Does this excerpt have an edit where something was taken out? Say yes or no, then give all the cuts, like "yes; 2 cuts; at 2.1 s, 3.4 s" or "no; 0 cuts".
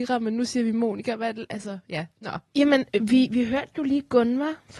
no; 0 cuts